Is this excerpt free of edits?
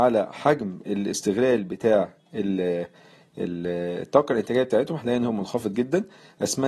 yes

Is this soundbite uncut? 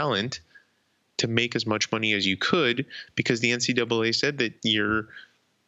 yes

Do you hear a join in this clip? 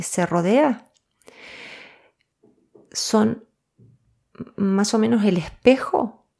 no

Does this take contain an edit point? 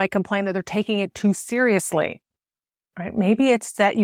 no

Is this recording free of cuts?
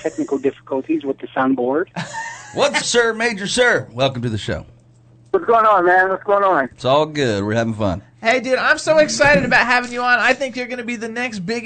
no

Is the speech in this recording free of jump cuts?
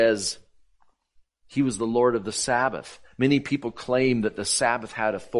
yes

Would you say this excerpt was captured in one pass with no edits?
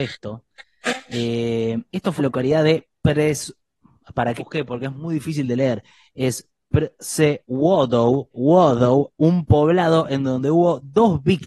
no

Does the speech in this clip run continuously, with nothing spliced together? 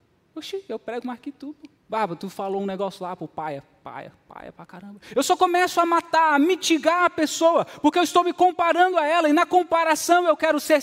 no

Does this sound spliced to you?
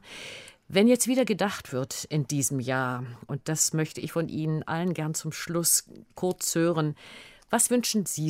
no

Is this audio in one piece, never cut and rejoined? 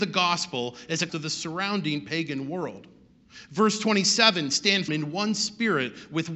no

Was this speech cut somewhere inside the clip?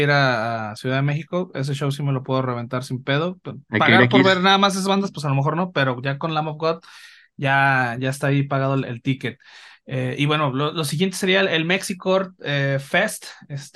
no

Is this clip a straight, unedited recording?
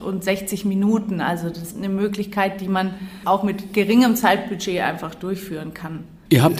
no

